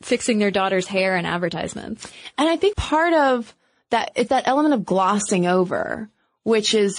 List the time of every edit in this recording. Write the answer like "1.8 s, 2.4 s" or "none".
2.7 s, 4.3 s